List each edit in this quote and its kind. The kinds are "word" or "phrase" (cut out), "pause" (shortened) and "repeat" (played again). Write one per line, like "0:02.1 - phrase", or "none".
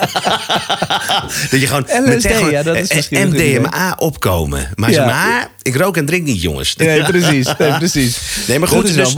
0:06.8 - word